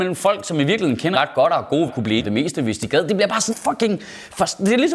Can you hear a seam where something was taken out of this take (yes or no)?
yes